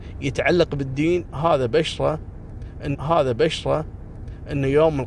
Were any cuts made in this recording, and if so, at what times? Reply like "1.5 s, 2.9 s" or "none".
2.9 s